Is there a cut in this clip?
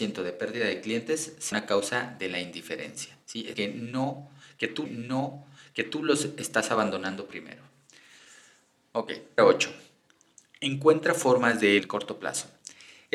yes; 6 cuts; at 1.5 s, 3.2 s, 3.5 s, 4.9 s, 9.4 s, 11.8 s

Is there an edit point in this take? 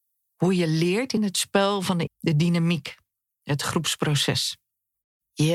yes; 2 cuts; at 1.2 s, 2.1 s

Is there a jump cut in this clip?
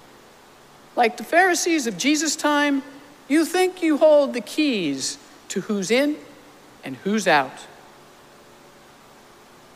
no; 0 cuts

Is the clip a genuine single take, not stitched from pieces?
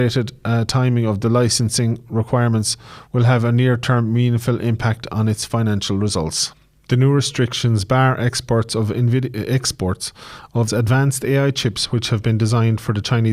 no; 1 cut; at 10.7 s

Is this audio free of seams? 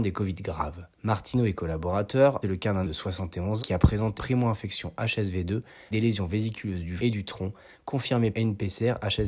no; 8 cuts; at 0.9 s, 2.4 s, 2.8 s, 3.6 s, 4.2 s, 5.9 s, 7.0 s, 8.3 s

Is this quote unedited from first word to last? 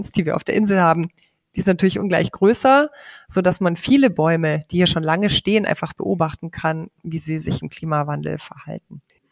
yes; 0 cuts

